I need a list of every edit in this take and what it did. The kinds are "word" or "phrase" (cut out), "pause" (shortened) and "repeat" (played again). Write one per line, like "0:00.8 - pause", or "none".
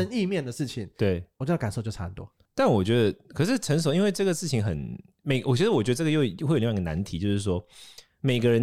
none